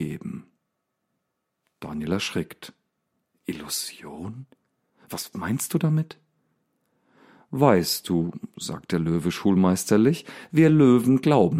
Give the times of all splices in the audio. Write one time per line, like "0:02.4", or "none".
0:05.3